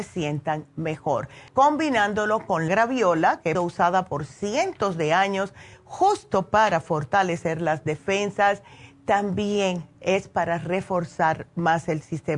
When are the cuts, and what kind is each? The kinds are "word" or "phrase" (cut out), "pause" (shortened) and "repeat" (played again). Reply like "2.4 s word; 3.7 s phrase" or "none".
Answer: 1.5 s pause; 2.7 s word; 3.5 s phrase